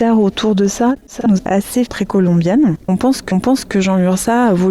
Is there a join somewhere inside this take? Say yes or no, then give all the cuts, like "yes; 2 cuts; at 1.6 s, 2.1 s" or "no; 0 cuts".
yes; 3 cuts; at 1.4 s, 1.9 s, 3.3 s